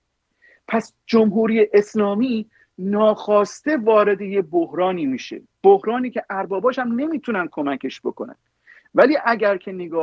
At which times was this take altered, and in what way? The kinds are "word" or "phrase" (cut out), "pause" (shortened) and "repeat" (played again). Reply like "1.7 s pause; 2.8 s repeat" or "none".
none